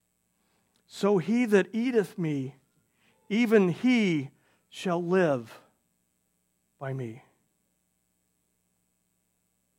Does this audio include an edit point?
no; 0 cuts

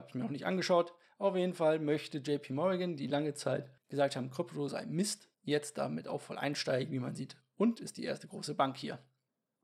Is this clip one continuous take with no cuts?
no; 3 cuts; at 1.0 s, 3.8 s, 5.3 s

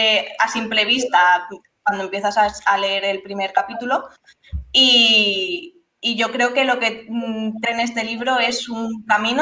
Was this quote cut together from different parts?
yes; 1 cut; at 7.6 s

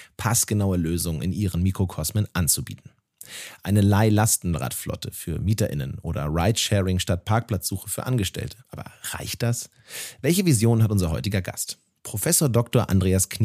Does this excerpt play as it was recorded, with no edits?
no; 1 cut; at 8.6 s

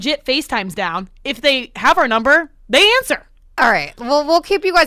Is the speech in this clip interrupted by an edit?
yes; 1 cut; at 3.4 s

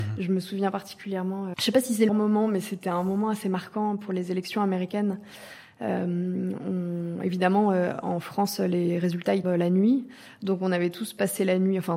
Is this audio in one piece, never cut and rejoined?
no; 3 cuts; at 1.5 s, 2.1 s, 9.4 s

